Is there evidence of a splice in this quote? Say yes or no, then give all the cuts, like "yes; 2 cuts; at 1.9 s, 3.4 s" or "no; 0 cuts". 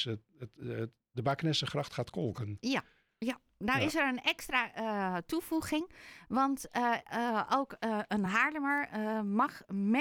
no; 0 cuts